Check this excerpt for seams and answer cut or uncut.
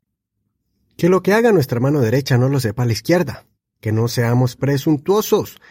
uncut